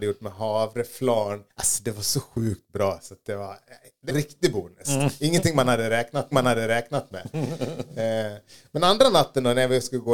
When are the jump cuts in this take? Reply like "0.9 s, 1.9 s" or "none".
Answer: 1.5 s, 4.1 s, 6.3 s